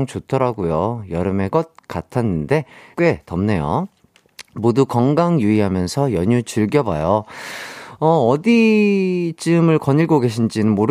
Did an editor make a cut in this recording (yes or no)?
yes